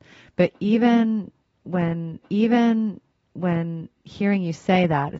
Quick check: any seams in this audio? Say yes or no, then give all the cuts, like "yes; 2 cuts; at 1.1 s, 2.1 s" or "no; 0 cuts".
yes; 1 cut; at 2.2 s